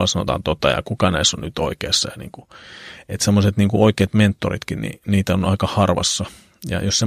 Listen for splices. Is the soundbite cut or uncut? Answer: uncut